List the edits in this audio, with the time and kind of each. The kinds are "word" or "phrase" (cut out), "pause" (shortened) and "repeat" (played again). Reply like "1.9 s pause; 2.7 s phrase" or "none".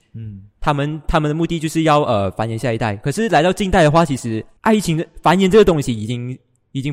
4.6 s pause